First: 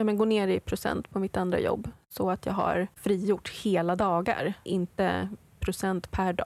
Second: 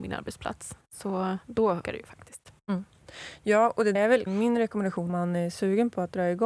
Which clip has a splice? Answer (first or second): second